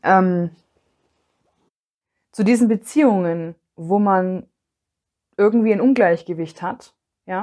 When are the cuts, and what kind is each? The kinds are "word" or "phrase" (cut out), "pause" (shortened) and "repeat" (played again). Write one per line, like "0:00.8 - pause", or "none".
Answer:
none